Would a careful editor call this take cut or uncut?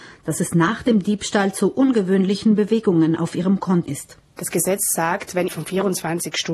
cut